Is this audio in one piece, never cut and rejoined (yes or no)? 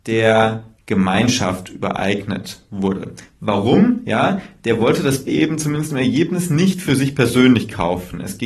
no